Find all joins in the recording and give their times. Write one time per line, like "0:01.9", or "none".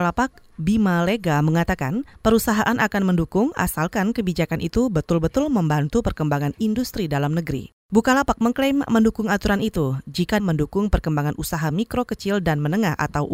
0:02.1
0:07.8
0:10.4